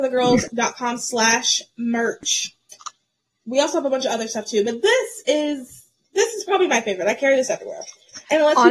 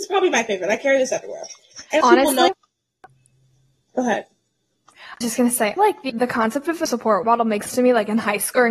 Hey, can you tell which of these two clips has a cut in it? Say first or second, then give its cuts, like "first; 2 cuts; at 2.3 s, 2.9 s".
second; 8 cuts; at 2.0 s, 2.5 s, 5.2 s, 5.8 s, 6.1 s, 6.9 s, 7.2 s, 7.7 s